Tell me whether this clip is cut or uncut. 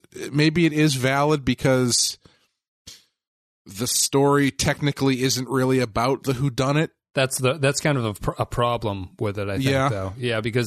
uncut